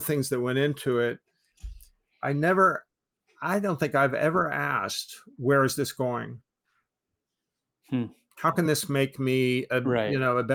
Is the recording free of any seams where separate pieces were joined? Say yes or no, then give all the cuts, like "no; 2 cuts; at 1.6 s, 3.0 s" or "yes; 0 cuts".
yes; 0 cuts